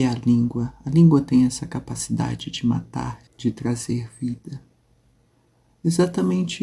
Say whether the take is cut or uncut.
cut